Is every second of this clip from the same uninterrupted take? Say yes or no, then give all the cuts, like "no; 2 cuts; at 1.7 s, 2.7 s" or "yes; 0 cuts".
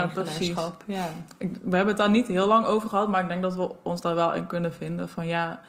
yes; 0 cuts